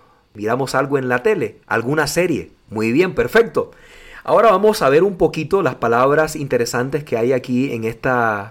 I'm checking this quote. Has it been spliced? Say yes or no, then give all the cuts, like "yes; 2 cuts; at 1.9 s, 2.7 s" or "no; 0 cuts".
yes; 2 cuts; at 1.6 s, 2.6 s